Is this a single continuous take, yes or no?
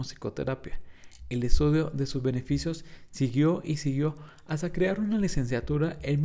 yes